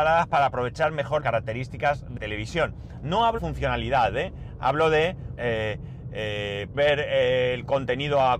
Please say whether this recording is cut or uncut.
cut